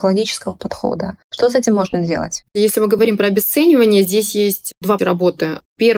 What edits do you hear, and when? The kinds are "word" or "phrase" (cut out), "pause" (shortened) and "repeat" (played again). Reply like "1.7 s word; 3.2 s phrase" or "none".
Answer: 1.2 s pause; 2.5 s pause; 5.0 s word